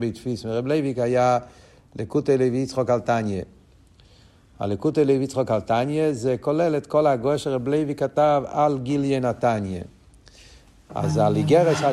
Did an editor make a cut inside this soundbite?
no; 0 cuts

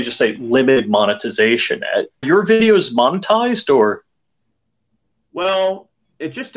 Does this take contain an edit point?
yes; 1 cut; at 2.2 s

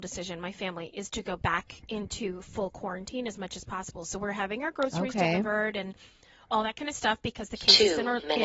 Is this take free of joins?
yes; 0 cuts

